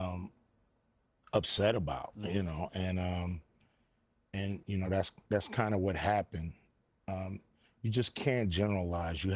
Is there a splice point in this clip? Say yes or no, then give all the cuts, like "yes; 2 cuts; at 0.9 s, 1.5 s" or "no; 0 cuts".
no; 0 cuts